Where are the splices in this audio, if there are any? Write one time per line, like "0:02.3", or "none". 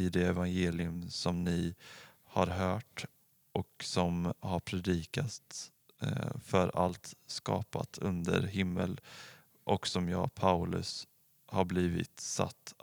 none

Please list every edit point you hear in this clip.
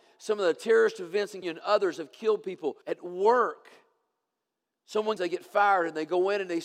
0:01.4
0:02.8
0:05.2

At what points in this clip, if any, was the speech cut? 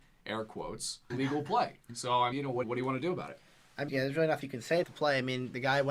0:01.1
0:02.3
0:02.6
0:03.9
0:04.4
0:04.8

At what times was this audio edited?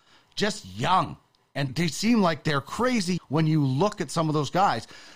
0:01.7
0:03.2

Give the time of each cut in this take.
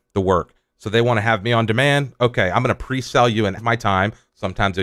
0:03.6

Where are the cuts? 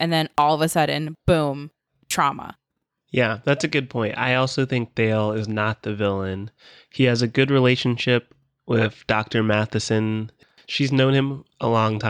none

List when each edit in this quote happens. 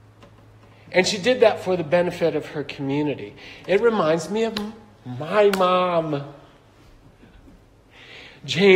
none

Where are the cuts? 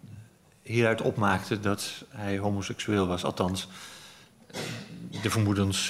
none

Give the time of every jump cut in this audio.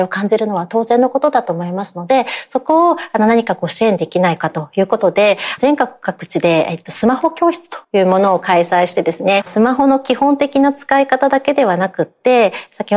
0:07.8

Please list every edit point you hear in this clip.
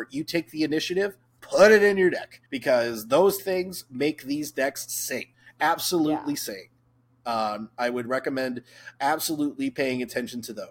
0:02.5
0:03.4
0:05.3

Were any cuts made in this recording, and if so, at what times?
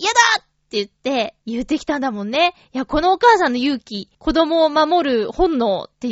0:01.4
0:04.1

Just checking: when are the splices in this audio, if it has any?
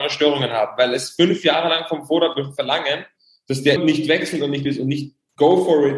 0:03.8
0:04.6

